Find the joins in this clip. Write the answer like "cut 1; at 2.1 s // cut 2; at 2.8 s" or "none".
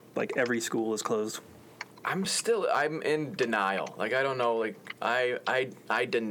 none